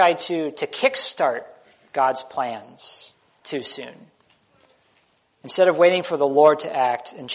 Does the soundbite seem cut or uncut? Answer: cut